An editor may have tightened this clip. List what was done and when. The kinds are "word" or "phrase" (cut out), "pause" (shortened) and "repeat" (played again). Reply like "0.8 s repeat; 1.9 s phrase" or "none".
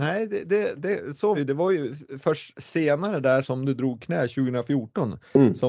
1.3 s word; 3.4 s word